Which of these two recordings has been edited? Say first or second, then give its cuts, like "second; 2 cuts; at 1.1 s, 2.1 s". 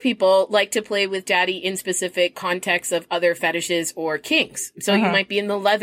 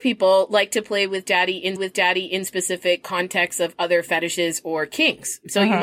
second; 1 cut; at 1.8 s